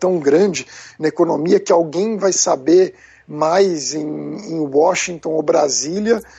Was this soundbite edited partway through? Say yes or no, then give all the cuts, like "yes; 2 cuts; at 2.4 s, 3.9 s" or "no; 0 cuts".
no; 0 cuts